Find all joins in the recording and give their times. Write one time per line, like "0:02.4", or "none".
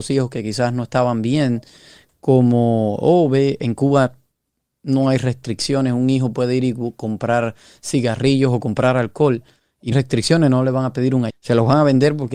0:09.9
0:11.3